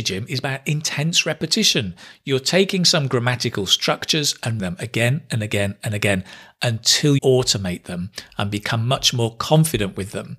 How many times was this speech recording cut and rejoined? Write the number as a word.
two